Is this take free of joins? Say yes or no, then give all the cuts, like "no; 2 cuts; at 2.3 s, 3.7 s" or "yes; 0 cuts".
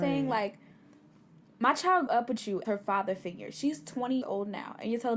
no; 3 cuts; at 2.1 s, 2.6 s, 4.2 s